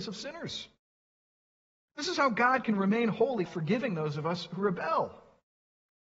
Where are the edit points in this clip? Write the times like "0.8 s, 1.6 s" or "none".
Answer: 3.5 s